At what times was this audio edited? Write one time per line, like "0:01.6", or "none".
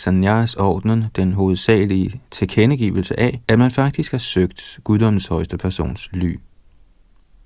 0:03.4